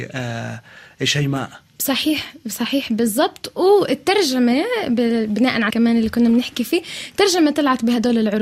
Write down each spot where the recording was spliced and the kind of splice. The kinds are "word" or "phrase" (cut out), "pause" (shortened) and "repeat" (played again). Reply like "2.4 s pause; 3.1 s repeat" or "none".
5.7 s word